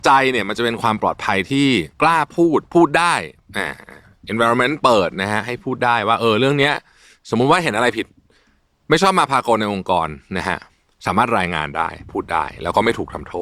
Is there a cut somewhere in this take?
no; 0 cuts

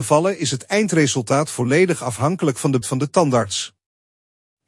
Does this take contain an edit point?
yes; 1 cut; at 2.8 s

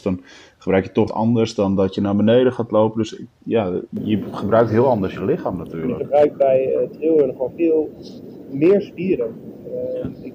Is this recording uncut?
no; 2 cuts; at 1.1 s, 7.5 s

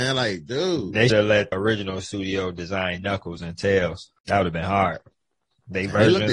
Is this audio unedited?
no; 3 cuts; at 1.1 s, 1.5 s, 4.2 s

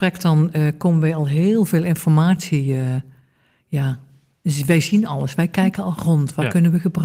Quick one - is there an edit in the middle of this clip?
no; 0 cuts

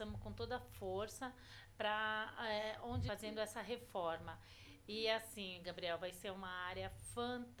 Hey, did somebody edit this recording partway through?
yes; 1 cut; at 3.1 s

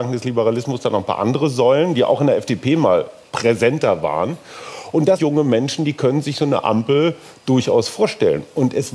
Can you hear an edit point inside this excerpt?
yes; 1 cut; at 5.2 s

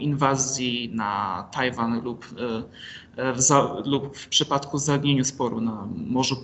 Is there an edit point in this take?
no; 0 cuts

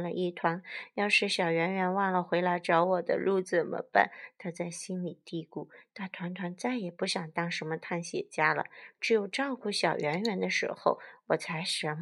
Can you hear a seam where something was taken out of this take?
no; 0 cuts

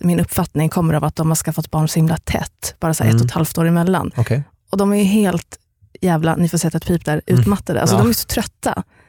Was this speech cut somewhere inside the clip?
no; 0 cuts

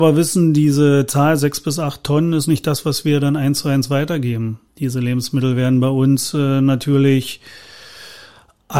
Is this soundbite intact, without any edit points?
no; 1 cut; at 4.7 s

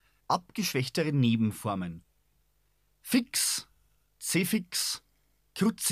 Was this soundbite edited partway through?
no; 0 cuts

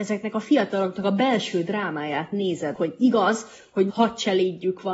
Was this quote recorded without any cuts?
no; 2 cuts; at 2.7 s, 3.9 s

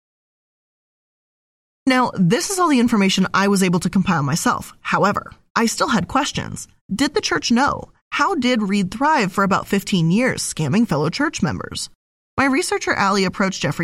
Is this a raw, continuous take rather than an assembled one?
yes; 0 cuts

